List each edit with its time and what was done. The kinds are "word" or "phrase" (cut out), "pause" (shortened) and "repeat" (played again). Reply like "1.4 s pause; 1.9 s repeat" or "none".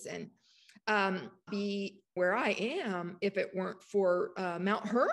1.5 s phrase; 2.2 s word